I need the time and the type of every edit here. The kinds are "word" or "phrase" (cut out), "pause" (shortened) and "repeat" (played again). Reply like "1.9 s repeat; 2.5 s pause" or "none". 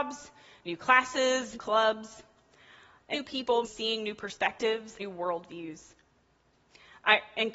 1.5 s word; 3.1 s word; 3.6 s word; 5.0 s word